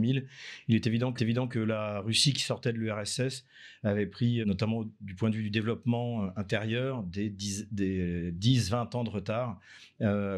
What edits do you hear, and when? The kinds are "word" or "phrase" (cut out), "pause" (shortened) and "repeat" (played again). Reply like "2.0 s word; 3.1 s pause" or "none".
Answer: 1.2 s repeat; 4.4 s word